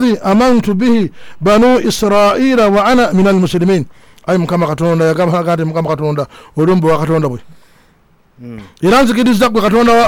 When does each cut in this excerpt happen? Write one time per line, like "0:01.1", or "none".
none